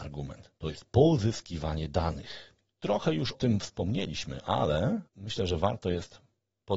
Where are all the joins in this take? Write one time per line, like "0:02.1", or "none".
0:03.3
0:05.1